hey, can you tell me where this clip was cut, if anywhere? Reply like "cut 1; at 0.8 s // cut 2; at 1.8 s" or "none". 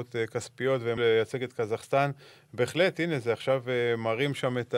cut 1; at 1.0 s